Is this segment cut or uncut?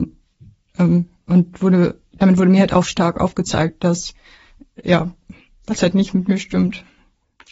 uncut